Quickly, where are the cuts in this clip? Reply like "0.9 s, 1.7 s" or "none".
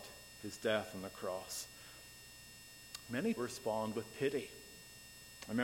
3.4 s